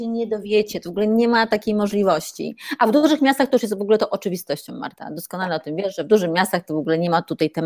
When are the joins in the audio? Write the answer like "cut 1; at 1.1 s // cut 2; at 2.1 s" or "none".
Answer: none